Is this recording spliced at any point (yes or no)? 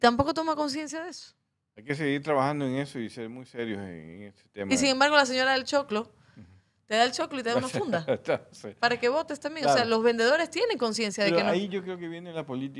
no